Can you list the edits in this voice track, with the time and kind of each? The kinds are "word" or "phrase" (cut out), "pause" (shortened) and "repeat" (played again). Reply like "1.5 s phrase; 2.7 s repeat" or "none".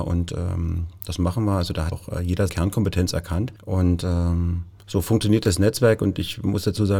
1.9 s word; 2.5 s word; 3.6 s pause; 4.8 s pause